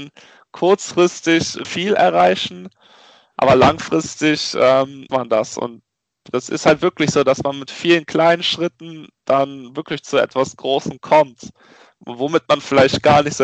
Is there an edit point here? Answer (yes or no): yes